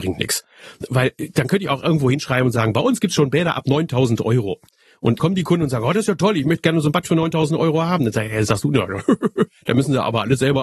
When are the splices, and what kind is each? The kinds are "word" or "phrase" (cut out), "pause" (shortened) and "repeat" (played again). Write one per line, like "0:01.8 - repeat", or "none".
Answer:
0:05.2 - word